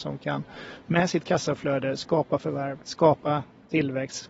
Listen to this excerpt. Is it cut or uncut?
cut